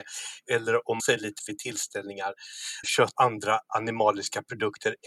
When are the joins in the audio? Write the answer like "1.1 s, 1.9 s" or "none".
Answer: 1.0 s, 1.4 s, 2.8 s, 3.2 s

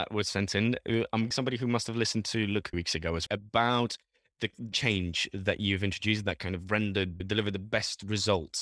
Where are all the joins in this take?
1.3 s, 2.7 s, 3.3 s, 4.7 s

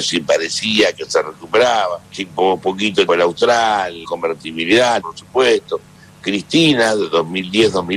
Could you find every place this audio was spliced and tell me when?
2.0 s, 3.1 s, 4.0 s, 5.0 s

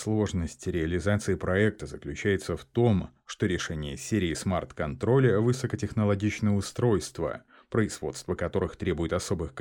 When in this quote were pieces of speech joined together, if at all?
none

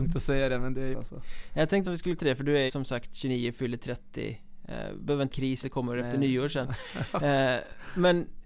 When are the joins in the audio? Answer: 0.9 s, 1.8 s, 2.2 s, 2.7 s, 5.3 s, 5.6 s

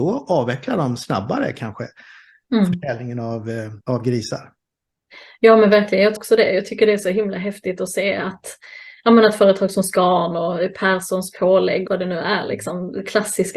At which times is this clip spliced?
3.8 s, 6.2 s, 11.9 s

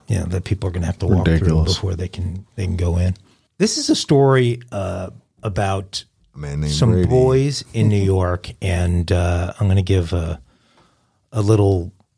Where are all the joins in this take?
none

